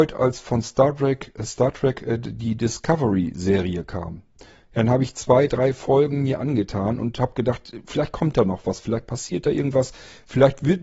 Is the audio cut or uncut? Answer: uncut